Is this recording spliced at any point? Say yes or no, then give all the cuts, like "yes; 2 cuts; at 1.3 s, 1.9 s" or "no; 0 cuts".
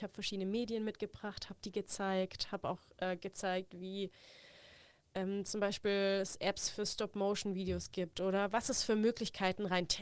no; 0 cuts